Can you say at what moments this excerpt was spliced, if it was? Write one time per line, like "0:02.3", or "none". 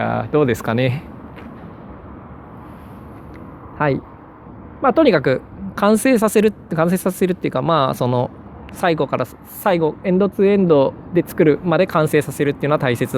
0:05.7